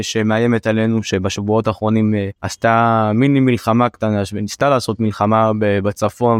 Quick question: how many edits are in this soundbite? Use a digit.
1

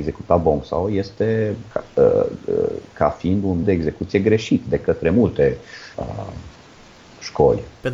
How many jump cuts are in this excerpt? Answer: 3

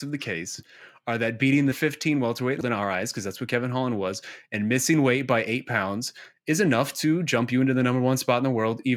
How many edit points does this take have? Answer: 2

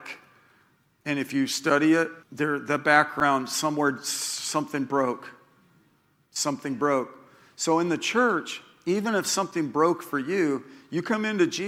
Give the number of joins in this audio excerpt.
1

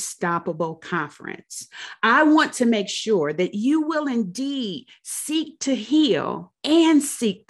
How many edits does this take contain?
1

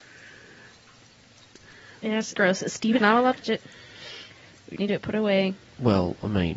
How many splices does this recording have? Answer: 4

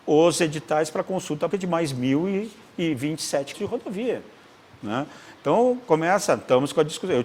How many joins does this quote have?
2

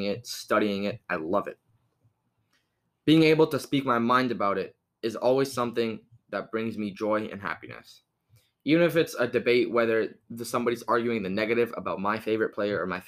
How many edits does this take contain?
0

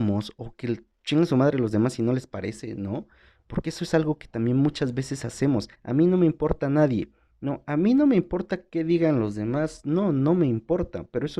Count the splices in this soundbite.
1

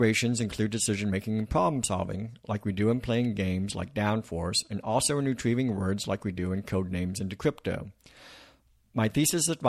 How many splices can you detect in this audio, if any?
0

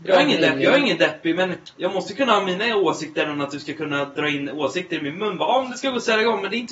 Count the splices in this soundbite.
1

